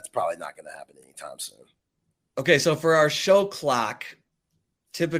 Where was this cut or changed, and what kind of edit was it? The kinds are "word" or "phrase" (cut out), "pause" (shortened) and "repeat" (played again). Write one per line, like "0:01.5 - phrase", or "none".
none